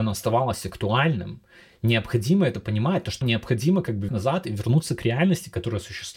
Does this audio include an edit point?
yes; 2 cuts; at 3.2 s, 4.1 s

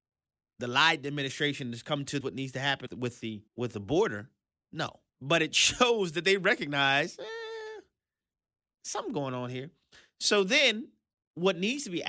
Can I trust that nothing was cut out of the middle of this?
no; 4 cuts; at 2.2 s, 2.9 s, 3.5 s, 5.1 s

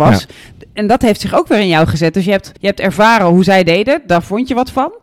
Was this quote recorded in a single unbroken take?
no; 1 cut; at 2.6 s

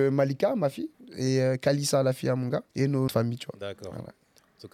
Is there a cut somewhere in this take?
yes; 3 cuts; at 0.9 s, 2.7 s, 3.1 s

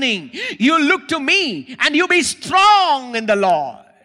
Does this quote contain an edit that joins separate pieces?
no; 0 cuts

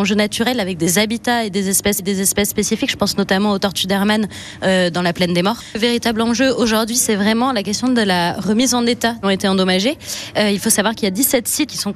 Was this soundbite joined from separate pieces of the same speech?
yes; 2 cuts; at 2.0 s, 9.2 s

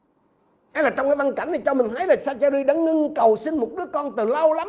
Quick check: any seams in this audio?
no; 0 cuts

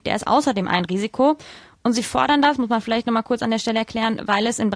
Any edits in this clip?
no; 0 cuts

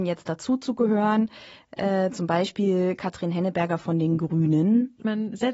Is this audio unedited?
yes; 0 cuts

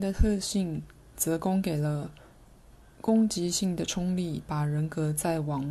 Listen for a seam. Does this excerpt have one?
no; 0 cuts

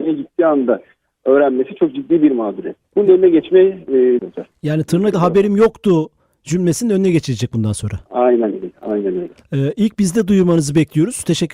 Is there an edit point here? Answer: yes; 4 cuts; at 2.8 s, 4.2 s, 5.1 s, 8.1 s

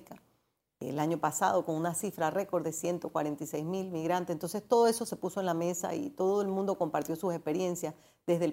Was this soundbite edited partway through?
no; 0 cuts

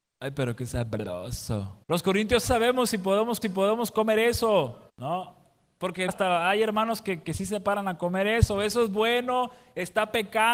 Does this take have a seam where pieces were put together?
yes; 5 cuts; at 1.8 s, 2.4 s, 3.4 s, 4.9 s, 6.1 s

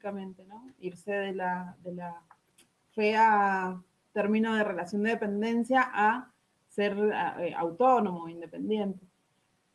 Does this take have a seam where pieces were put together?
no; 0 cuts

